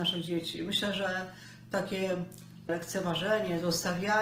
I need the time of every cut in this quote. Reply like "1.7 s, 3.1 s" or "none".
2.7 s